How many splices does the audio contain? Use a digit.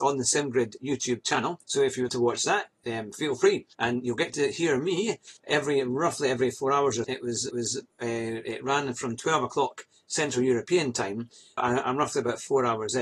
7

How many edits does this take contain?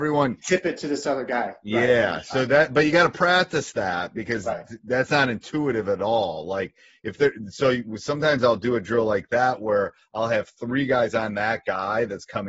0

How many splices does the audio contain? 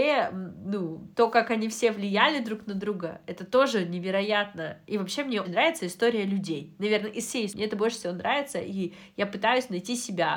3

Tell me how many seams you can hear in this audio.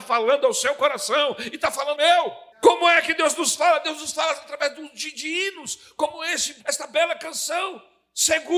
3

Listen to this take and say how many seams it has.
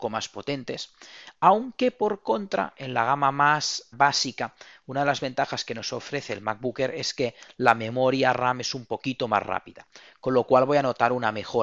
1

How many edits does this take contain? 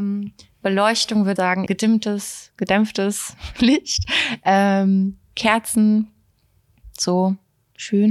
2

